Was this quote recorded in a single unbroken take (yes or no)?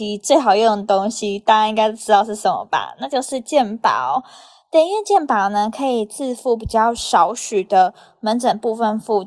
yes